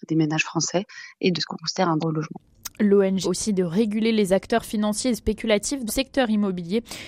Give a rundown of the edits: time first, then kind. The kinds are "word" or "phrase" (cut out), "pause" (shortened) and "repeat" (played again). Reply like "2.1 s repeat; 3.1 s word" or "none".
1.3 s word; 2.0 s word; 3.2 s word; 5.9 s word